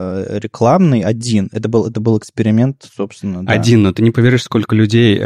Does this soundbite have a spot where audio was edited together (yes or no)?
no